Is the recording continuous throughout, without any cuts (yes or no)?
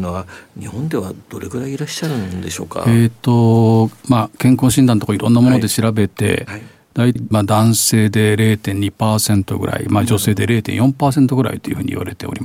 no